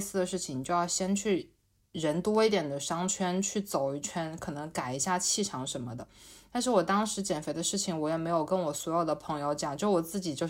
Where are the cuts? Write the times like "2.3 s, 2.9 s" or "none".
none